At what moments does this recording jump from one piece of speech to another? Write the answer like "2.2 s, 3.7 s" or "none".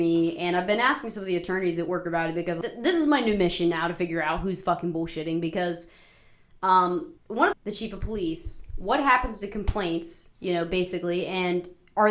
2.6 s, 7.2 s, 7.5 s